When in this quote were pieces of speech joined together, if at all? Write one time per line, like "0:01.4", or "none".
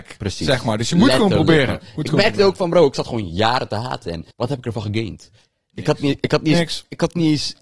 0:04.3